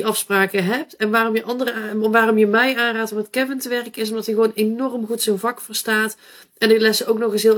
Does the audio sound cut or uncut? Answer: uncut